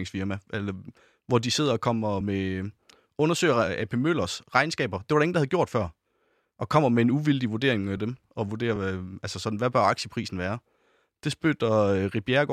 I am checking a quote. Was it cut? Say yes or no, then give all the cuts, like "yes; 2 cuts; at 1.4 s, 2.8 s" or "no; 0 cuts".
no; 0 cuts